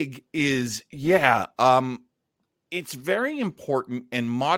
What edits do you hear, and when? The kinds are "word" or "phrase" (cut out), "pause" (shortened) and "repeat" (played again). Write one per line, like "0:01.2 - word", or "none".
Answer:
none